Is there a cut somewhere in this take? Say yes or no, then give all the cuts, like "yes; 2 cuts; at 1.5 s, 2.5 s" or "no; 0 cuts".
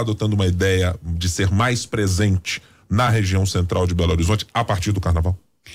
no; 0 cuts